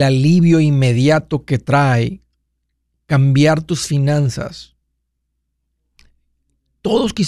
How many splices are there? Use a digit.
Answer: 0